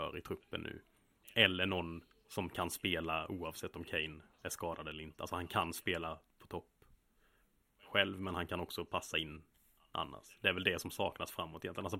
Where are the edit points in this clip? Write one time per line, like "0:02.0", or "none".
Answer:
0:04.3